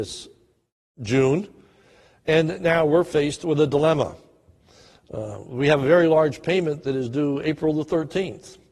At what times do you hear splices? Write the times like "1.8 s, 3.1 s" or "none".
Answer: none